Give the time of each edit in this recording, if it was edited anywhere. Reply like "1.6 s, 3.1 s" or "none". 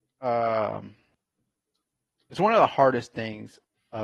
none